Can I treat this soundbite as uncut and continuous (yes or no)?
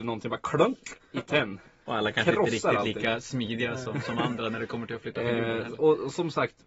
yes